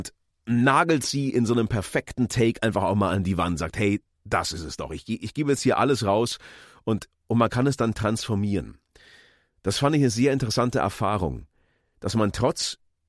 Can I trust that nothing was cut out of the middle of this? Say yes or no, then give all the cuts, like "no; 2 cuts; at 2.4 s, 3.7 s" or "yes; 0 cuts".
yes; 0 cuts